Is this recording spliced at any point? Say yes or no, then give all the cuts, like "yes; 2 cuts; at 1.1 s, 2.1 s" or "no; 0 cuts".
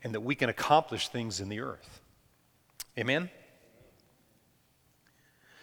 no; 0 cuts